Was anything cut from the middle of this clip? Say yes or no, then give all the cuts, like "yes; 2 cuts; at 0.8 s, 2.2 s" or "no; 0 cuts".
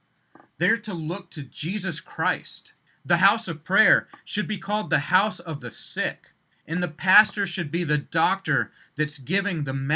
yes; 2 cuts; at 2.9 s, 6.5 s